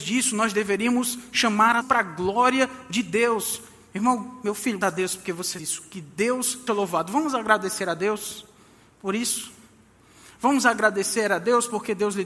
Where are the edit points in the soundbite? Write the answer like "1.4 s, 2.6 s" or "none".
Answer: 1.8 s, 4.8 s, 5.6 s, 6.7 s